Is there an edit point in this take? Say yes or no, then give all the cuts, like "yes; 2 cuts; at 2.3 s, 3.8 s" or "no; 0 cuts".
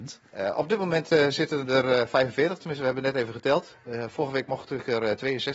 no; 0 cuts